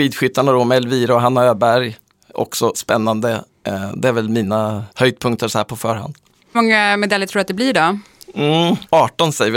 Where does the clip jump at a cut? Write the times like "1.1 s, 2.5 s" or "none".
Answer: 2.7 s, 4.9 s, 6.5 s